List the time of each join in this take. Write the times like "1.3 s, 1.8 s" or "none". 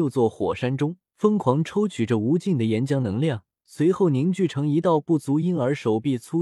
1.1 s, 3.5 s